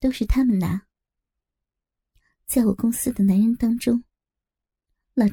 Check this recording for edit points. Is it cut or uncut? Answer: uncut